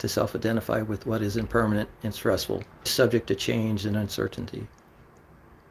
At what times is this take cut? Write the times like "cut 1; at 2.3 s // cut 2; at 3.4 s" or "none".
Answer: cut 1; at 2.9 s